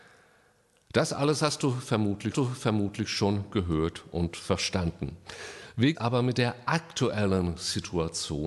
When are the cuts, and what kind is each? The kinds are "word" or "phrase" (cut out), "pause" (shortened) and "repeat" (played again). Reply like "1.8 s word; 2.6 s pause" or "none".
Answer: 2.3 s repeat; 5.9 s phrase